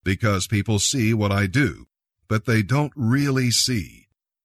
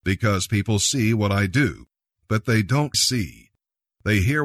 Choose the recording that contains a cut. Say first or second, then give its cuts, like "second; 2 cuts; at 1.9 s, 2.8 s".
second; 1 cut; at 2.9 s